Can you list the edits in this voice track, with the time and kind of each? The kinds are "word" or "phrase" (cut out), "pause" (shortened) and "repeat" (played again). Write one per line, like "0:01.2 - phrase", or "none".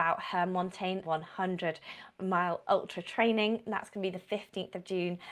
0:01.0 - word
0:02.2 - word

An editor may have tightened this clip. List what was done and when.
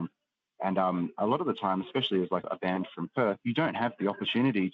0:02.4 - word

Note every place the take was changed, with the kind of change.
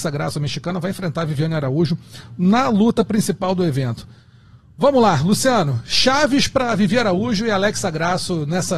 none

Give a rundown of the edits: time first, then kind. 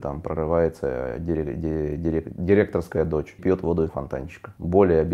0:03.4 - word
0:03.9 - word

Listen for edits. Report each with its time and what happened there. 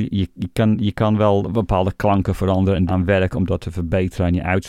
0:02.9 - word

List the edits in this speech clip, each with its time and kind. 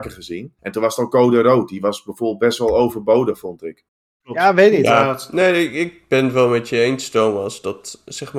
none

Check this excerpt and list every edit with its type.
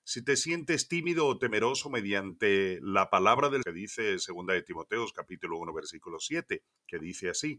0:03.6 - phrase

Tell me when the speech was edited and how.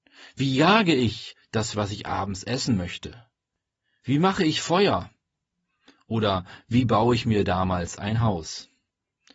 0:01.7 - word

